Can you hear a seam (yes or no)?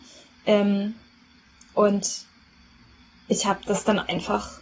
no